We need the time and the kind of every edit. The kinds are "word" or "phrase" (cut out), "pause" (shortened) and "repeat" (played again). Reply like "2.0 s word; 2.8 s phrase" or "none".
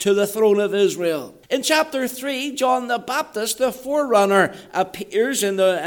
1.4 s pause